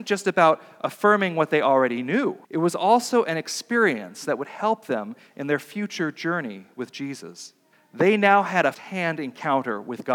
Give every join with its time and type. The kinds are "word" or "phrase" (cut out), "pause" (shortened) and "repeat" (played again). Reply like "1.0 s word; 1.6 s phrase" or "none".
2.4 s pause; 7.7 s pause; 8.7 s word